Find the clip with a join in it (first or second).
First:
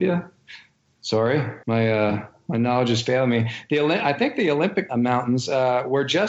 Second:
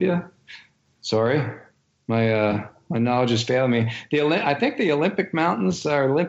first